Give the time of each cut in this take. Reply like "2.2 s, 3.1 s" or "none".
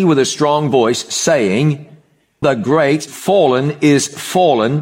2.4 s, 3.1 s